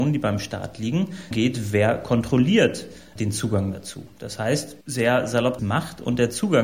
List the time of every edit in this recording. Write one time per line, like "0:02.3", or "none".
0:01.3
0:04.8
0:05.6